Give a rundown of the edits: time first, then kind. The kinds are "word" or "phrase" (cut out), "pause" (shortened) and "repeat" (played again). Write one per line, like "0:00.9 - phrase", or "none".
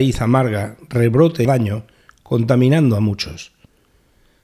0:01.4 - phrase